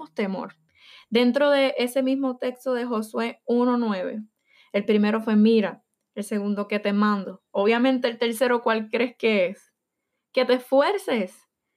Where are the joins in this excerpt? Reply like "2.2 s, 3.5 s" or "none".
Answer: none